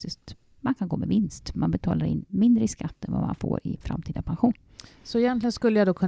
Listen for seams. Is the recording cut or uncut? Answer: uncut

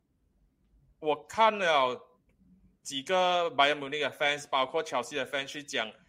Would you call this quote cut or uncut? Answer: uncut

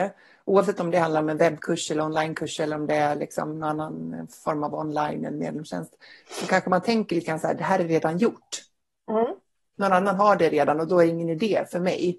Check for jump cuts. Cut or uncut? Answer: uncut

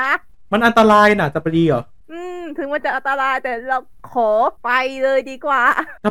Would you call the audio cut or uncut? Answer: uncut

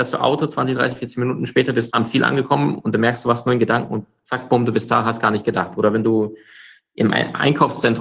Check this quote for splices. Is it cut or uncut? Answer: cut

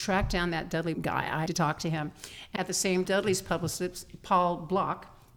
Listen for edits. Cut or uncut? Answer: cut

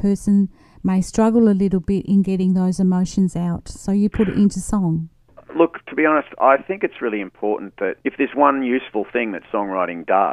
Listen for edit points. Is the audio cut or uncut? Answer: cut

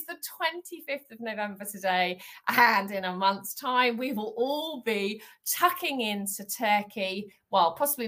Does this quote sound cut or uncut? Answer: uncut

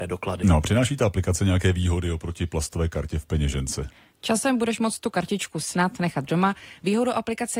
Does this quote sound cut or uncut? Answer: uncut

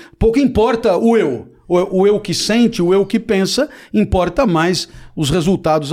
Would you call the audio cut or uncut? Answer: uncut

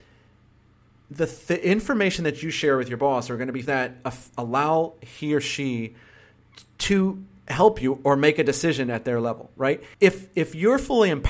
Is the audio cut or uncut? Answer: cut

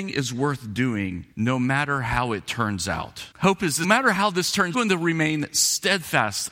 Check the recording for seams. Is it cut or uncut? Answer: cut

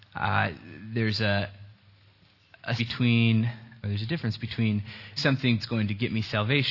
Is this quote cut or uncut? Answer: cut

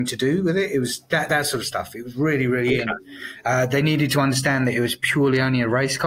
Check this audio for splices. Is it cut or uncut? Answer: uncut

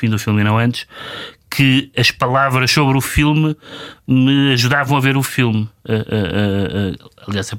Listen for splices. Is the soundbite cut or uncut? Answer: uncut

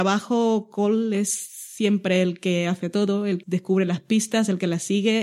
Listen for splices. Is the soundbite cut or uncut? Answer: cut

